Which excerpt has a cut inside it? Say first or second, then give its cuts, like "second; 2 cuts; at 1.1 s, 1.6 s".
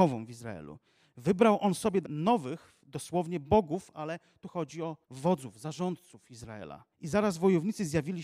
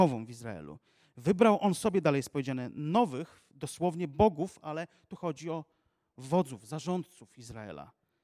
first; 3 cuts; at 2.0 s, 5.0 s, 6.9 s